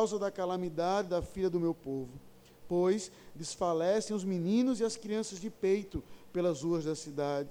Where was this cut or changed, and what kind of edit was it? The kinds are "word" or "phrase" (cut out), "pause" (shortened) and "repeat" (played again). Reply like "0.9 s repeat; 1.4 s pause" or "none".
none